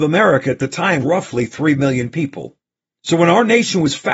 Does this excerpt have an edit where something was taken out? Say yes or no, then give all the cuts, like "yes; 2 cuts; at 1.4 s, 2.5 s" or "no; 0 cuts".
yes; 1 cut; at 1.0 s